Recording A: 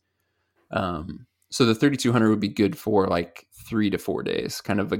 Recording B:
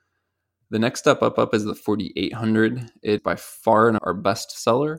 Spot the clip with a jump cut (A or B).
B